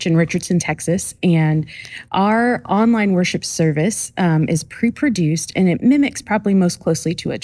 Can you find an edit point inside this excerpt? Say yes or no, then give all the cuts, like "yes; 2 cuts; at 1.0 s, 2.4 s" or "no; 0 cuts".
no; 0 cuts